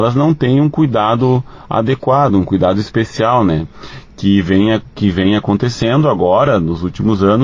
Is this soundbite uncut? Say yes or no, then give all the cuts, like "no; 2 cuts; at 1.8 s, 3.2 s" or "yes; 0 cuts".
yes; 0 cuts